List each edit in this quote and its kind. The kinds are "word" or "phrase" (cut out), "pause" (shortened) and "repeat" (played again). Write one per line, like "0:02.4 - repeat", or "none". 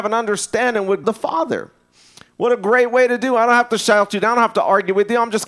0:01.0 - word